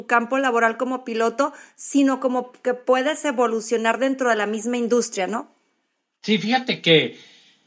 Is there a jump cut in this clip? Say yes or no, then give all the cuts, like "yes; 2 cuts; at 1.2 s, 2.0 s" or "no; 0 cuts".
no; 0 cuts